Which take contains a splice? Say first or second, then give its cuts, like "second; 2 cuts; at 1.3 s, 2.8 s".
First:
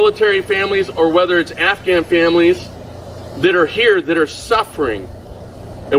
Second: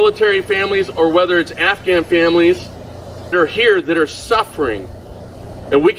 second; 1 cut; at 3.3 s